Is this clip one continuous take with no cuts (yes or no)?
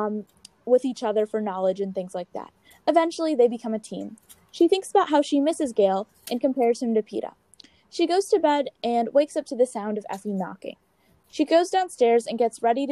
yes